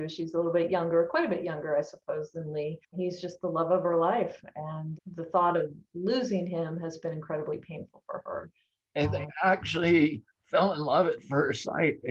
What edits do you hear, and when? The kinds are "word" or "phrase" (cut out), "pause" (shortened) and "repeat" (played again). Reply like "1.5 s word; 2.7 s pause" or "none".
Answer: 2.8 s pause; 10.3 s pause